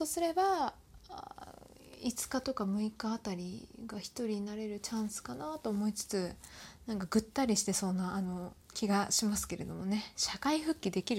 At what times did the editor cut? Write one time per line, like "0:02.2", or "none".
0:08.6